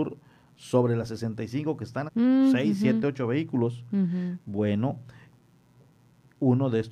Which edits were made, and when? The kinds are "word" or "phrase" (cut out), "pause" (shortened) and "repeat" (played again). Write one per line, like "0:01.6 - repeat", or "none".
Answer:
0:02.1 - word